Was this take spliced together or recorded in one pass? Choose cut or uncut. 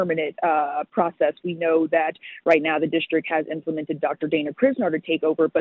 uncut